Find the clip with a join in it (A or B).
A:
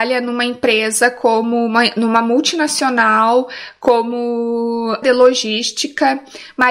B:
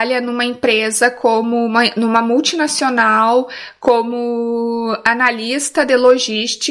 A